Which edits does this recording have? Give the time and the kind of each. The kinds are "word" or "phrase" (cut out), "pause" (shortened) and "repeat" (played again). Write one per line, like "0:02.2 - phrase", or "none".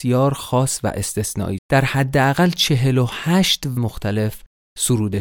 0:01.6 - phrase
0:03.8 - word